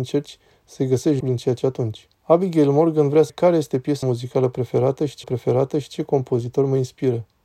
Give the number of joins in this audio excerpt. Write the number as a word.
six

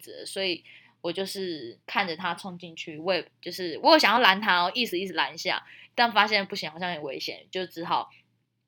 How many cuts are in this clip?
one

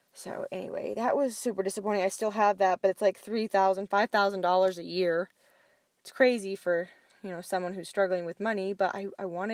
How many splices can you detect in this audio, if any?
zero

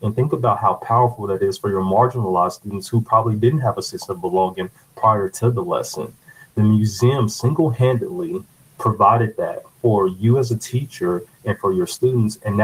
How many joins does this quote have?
zero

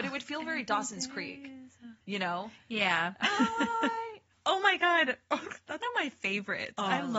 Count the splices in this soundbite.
two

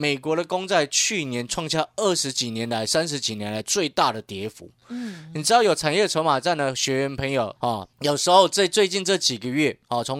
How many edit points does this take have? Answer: two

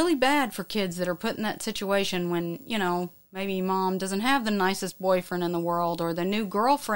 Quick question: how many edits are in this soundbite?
zero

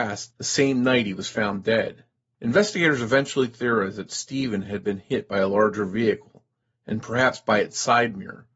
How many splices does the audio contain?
zero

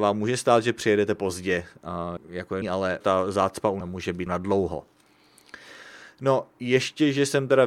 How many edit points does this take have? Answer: five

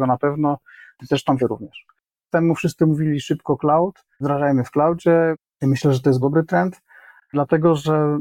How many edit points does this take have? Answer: four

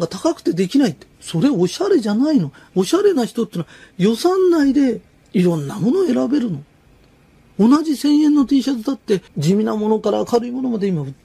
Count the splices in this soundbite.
two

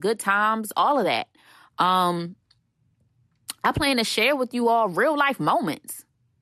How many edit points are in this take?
zero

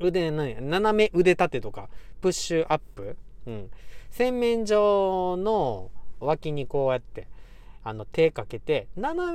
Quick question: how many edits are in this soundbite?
one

